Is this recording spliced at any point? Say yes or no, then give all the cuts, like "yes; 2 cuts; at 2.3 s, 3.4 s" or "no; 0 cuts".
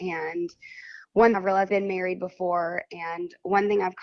yes; 2 cuts; at 1.3 s, 1.7 s